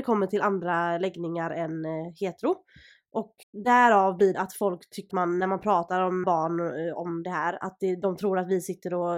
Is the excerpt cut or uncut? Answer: cut